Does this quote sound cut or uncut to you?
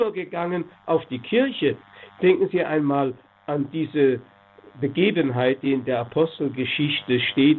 uncut